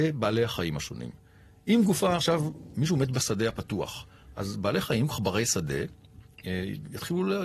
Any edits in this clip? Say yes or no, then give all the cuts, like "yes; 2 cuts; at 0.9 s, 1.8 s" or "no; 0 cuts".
yes; 1 cut; at 5.1 s